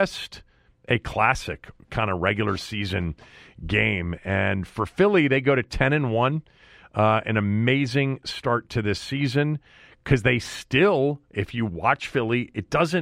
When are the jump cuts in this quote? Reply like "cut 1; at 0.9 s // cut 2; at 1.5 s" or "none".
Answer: none